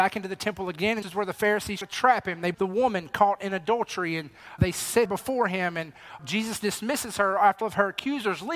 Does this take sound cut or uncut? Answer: cut